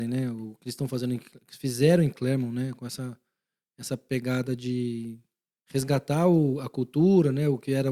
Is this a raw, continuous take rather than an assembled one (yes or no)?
yes